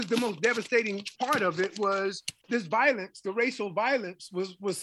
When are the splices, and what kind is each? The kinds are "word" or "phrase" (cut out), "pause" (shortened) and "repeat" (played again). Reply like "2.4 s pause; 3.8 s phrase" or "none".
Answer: 1.1 s word; 2.4 s pause